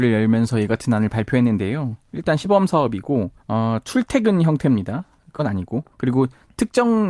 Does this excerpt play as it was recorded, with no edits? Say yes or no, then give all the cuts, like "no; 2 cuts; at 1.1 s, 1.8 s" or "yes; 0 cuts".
no; 3 cuts; at 3.4 s, 5.4 s, 5.9 s